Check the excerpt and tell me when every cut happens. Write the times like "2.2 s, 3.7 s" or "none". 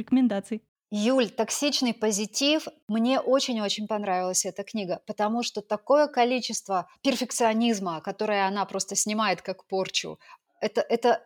7.0 s